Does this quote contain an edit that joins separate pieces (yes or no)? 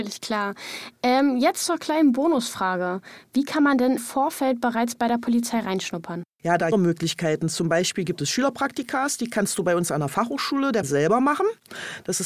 yes